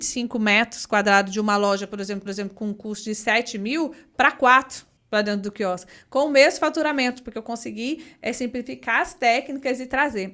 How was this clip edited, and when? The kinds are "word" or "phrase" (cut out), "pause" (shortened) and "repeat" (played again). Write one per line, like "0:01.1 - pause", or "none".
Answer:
0:02.3 - repeat
0:05.0 - pause